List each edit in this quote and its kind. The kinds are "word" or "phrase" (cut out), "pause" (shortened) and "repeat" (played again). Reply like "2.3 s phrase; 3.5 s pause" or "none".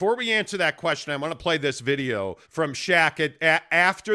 2.4 s pause